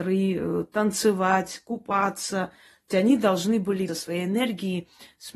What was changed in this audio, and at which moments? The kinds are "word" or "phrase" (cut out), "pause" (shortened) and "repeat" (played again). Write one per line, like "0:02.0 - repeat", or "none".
0:02.9 - word
0:03.9 - word